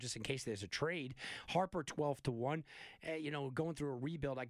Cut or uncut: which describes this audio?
uncut